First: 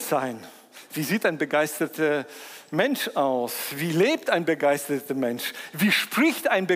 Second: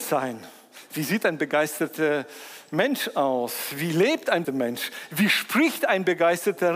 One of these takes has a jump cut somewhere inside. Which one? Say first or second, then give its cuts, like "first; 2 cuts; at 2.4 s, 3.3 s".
second; 1 cut; at 4.4 s